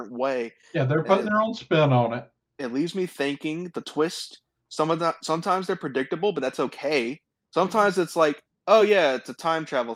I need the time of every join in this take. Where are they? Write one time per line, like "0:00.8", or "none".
none

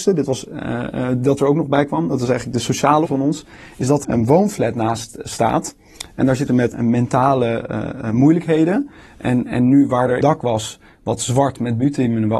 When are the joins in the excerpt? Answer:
0:03.1
0:04.0
0:06.5
0:10.2

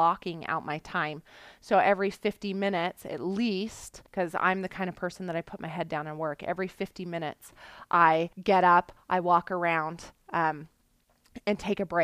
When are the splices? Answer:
0:04.1
0:08.3

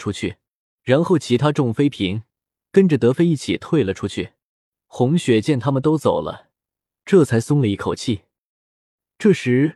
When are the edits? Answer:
none

